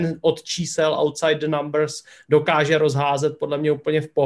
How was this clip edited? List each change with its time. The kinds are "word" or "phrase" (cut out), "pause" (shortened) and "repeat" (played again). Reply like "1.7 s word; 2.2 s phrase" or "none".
none

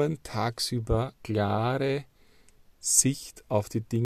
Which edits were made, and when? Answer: 1.1 s word

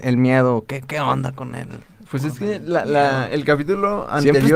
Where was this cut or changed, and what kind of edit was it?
none

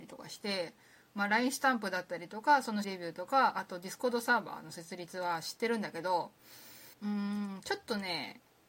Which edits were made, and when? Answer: 2.8 s word; 6.9 s pause

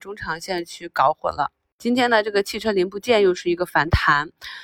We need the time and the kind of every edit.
none

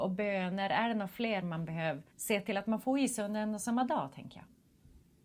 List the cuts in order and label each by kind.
2.1 s pause

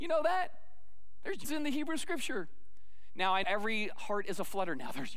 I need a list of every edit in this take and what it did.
1.4 s word; 3.4 s word

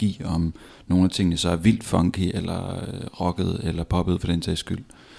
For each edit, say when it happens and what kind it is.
none

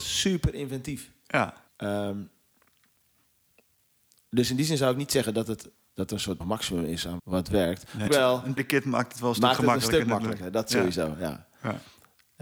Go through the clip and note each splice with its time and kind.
1.7 s pause; 5.9 s word; 6.4 s word; 7.2 s word; 8.1 s phrase; 8.6 s word

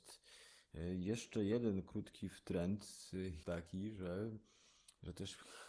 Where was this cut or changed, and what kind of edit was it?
3.4 s word

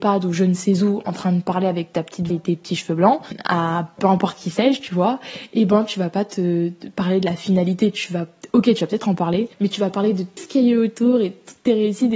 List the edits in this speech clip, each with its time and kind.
2.3 s word; 9.5 s pause; 10.4 s word

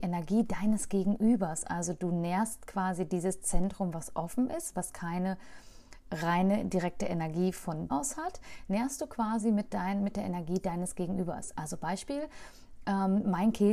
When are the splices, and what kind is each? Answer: 7.9 s word

